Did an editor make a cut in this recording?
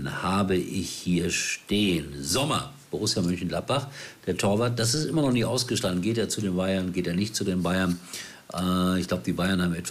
no; 0 cuts

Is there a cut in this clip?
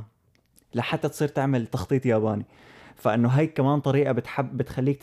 no; 0 cuts

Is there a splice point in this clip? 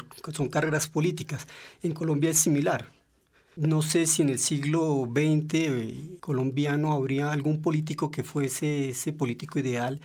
no; 0 cuts

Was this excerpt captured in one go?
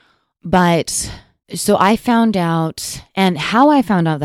yes; 0 cuts

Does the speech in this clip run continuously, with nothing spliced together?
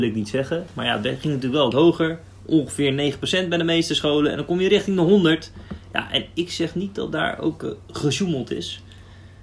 no; 1 cut; at 1.7 s

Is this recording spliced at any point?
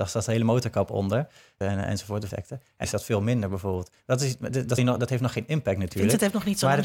yes; 4 cuts; at 1.6 s, 2.3 s, 2.8 s, 4.8 s

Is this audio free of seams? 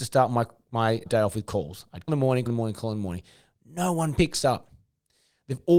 no; 3 cuts; at 1.1 s, 2.1 s, 2.5 s

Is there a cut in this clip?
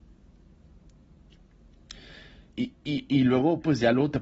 yes; 1 cut; at 2.5 s

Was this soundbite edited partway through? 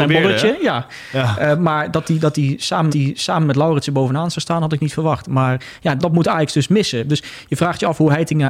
yes; 2 cuts; at 2.9 s, 6.0 s

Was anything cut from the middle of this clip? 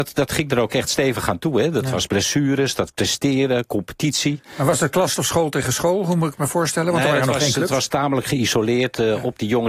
yes; 3 cuts; at 2.1 s, 2.9 s, 5.2 s

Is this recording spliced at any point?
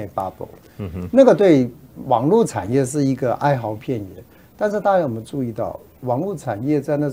no; 0 cuts

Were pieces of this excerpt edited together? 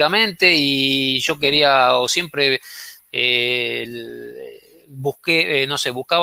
no; 0 cuts

